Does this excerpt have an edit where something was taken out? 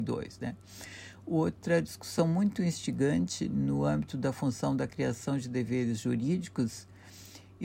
no; 0 cuts

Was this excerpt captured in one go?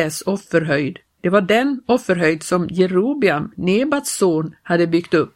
yes; 0 cuts

